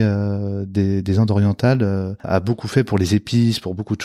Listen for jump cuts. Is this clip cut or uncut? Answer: cut